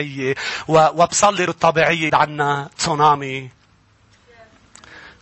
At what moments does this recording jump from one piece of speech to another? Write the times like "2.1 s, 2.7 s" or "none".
1.5 s, 2.1 s